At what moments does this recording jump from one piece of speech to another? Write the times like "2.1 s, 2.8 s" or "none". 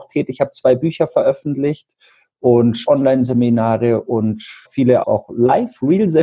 2.9 s, 4.7 s, 5.0 s